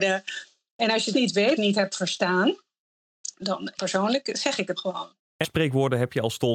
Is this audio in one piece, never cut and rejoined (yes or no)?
no